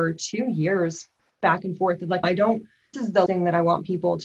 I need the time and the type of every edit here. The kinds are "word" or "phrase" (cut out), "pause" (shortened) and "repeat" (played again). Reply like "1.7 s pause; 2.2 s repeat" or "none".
2.2 s word; 2.9 s word; 3.3 s word